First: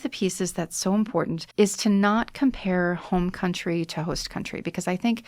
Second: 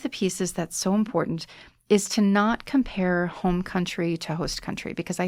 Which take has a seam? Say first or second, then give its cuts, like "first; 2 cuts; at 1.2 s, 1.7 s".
first; 1 cut; at 1.5 s